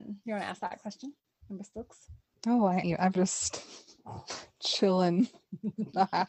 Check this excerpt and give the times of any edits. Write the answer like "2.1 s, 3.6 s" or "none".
2.8 s, 3.2 s